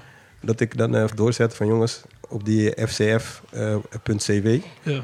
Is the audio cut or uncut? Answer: cut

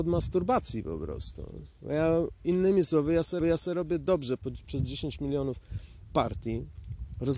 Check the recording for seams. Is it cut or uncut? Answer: cut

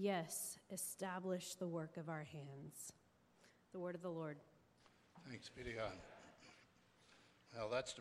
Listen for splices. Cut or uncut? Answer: uncut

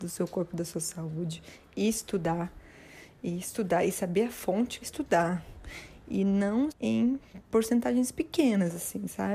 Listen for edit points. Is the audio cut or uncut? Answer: cut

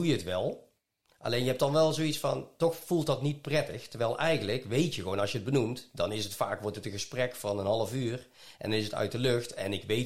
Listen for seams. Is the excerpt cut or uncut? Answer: uncut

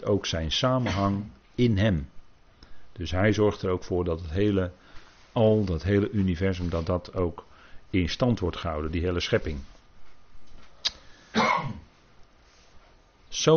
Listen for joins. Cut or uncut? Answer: uncut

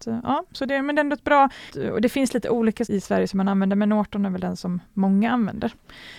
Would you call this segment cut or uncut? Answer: cut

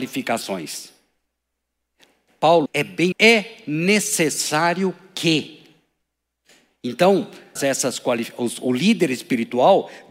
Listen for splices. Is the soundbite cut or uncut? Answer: cut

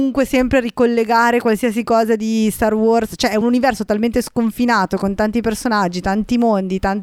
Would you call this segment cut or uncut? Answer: uncut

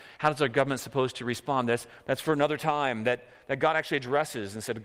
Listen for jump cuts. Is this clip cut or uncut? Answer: uncut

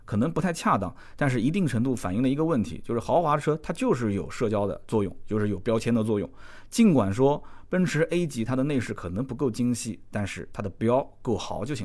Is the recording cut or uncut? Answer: uncut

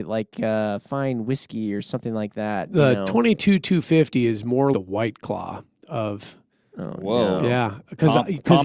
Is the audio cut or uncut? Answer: cut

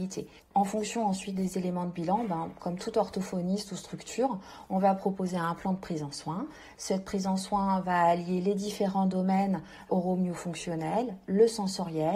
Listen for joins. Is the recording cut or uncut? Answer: uncut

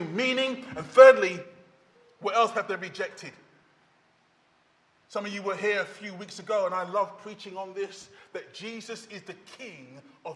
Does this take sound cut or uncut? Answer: uncut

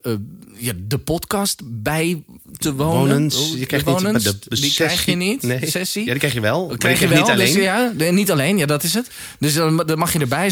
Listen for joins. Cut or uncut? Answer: uncut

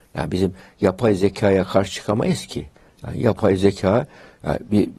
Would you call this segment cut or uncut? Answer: uncut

